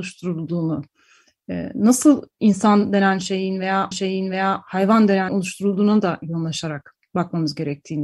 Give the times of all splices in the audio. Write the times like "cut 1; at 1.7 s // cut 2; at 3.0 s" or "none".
cut 1; at 3.9 s // cut 2; at 5.3 s